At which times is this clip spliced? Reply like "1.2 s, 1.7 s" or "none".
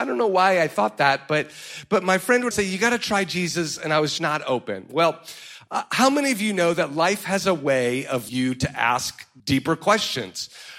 2.5 s, 4.2 s, 8.3 s, 9.4 s